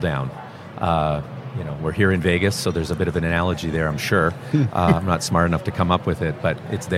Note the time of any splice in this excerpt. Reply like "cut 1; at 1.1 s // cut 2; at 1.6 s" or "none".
none

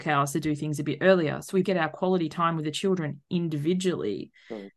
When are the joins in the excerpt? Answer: cut 1; at 1.6 s

